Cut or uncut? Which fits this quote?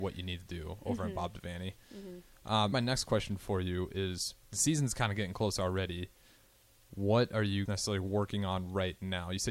cut